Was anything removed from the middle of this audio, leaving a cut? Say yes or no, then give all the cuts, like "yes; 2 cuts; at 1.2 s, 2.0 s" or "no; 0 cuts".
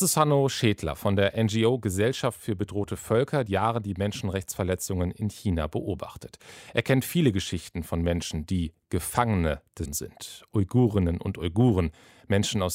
yes; 2 cuts; at 3.5 s, 9.8 s